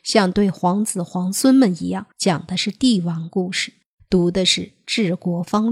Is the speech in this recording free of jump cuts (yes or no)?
no